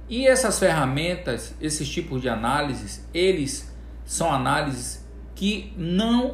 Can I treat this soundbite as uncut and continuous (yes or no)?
yes